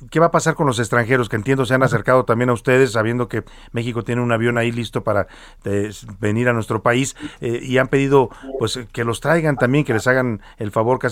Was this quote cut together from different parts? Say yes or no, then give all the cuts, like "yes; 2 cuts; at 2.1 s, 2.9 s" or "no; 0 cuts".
no; 0 cuts